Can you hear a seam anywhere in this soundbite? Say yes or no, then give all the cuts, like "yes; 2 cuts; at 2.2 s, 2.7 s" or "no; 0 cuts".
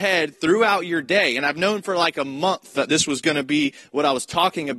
no; 0 cuts